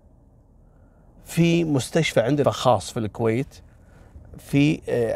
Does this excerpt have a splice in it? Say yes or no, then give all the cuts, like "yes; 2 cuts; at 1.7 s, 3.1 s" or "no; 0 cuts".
yes; 1 cut; at 2.4 s